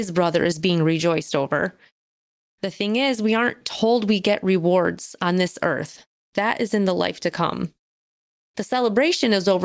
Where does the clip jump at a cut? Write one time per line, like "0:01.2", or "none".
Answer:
none